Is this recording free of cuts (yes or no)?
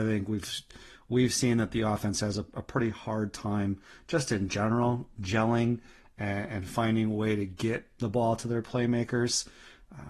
yes